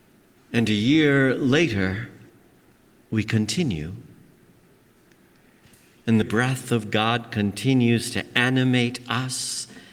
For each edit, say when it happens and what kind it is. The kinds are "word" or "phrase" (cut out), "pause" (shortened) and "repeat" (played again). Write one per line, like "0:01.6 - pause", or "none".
0:02.8 - pause
0:06.2 - phrase

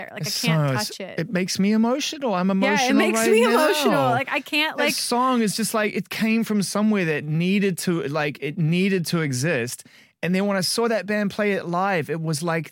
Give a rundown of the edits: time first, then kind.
none

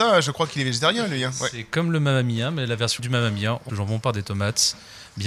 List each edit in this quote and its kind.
0:03.0 - word
0:03.7 - word

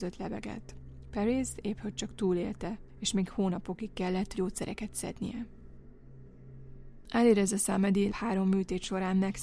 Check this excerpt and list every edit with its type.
0:04.3 - word
0:08.1 - word

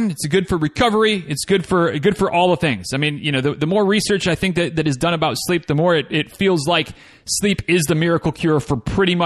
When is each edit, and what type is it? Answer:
none

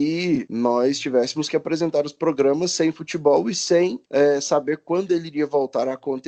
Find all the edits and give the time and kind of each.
none

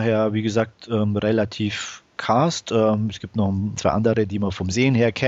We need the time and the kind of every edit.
0:02.2 - word
0:03.8 - word

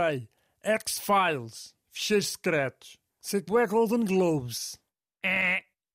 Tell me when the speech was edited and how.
0:03.1 - pause
0:03.5 - word

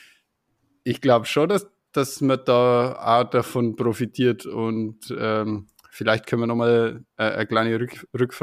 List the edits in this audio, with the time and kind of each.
none

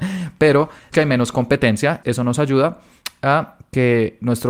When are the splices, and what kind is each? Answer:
0:00.9 - word
0:02.0 - word

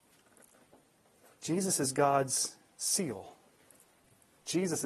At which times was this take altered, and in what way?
none

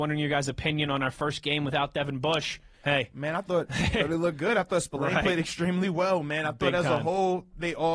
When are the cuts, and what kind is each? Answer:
0:02.7 - pause

